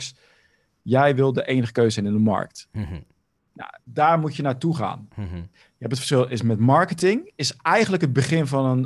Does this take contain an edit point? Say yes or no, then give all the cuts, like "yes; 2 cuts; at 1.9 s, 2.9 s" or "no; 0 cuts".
yes; 2 cuts; at 3.8 s, 5.6 s